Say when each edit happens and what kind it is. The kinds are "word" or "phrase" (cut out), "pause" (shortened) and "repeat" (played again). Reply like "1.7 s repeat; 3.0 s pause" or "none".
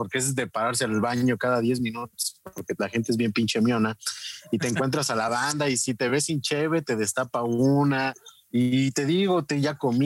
none